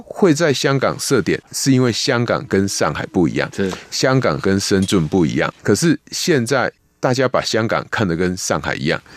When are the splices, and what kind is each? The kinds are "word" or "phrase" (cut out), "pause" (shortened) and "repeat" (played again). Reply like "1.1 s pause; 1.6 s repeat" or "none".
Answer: 1.4 s pause; 5.6 s pause